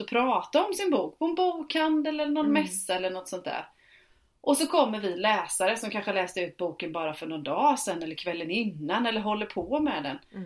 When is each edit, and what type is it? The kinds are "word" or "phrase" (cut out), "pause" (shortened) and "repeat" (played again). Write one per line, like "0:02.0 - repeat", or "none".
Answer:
none